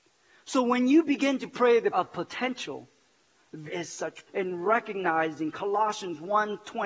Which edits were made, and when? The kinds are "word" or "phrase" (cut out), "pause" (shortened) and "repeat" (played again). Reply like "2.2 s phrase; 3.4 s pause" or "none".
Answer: 1.9 s word; 3.7 s word; 4.3 s word